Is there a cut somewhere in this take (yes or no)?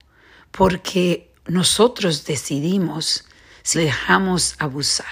yes